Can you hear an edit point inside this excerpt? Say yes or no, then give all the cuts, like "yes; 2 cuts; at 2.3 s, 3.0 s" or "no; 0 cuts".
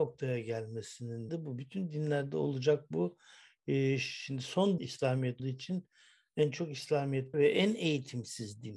yes; 4 cuts; at 1.3 s, 4.8 s, 5.4 s, 7.3 s